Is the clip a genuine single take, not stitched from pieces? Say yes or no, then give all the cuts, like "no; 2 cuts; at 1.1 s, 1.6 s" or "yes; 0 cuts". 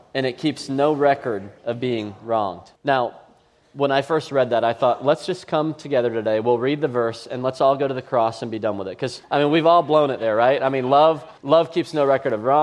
no; 4 cuts; at 1.6 s, 2.8 s, 9.2 s, 11.4 s